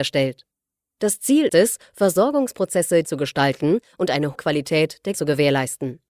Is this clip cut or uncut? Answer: cut